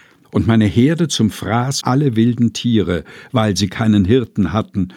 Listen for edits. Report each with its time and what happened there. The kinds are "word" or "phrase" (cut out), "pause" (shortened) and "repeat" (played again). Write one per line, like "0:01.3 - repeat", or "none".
0:01.8 - word